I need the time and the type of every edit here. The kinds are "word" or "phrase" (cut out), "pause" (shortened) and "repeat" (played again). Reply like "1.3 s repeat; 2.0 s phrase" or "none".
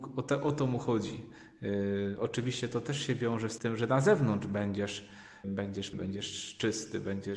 3.6 s word; 5.4 s word; 5.9 s word